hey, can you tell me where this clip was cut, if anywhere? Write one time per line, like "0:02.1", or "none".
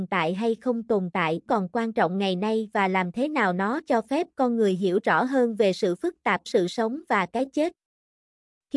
0:01.5
0:06.5